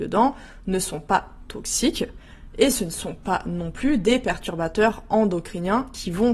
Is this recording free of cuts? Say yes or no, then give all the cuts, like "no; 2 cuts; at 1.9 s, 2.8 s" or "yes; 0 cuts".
yes; 0 cuts